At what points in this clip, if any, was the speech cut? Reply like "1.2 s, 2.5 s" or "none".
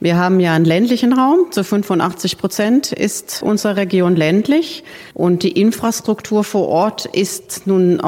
3.4 s, 5.1 s